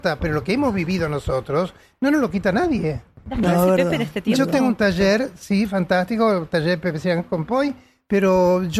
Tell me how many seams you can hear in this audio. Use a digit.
0